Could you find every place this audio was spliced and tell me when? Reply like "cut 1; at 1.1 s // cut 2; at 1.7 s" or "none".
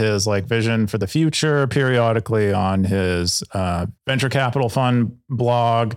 cut 1; at 4.0 s